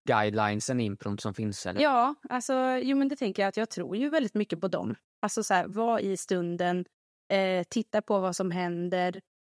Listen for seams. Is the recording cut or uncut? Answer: uncut